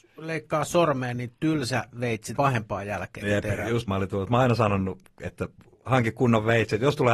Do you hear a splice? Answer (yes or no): yes